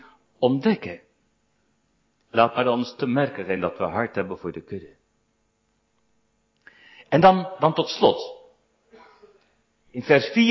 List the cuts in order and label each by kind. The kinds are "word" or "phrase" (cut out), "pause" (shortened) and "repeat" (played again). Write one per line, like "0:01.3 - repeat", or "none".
none